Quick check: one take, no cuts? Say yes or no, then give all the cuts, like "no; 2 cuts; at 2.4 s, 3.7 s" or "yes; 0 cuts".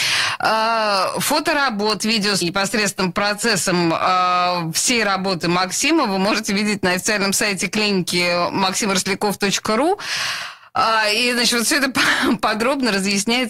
no; 1 cut; at 2.4 s